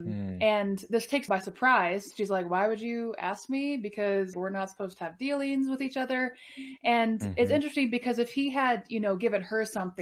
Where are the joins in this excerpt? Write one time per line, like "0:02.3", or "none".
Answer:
0:01.3
0:04.3